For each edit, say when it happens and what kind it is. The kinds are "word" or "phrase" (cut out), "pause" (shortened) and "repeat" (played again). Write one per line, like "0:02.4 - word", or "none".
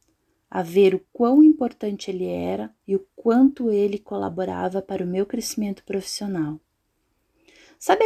0:01.1 - pause
0:02.8 - pause